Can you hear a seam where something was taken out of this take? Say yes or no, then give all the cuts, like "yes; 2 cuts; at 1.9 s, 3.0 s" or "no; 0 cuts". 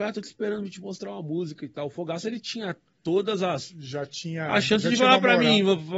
no; 0 cuts